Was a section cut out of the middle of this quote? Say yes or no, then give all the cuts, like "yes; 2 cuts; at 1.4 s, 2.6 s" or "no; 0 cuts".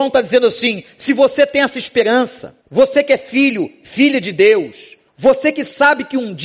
yes; 2 cuts; at 2.6 s, 5.1 s